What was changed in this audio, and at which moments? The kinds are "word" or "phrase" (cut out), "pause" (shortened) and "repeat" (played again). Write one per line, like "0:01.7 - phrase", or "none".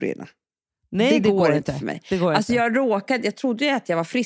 none